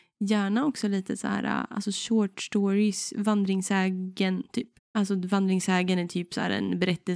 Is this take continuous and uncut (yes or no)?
no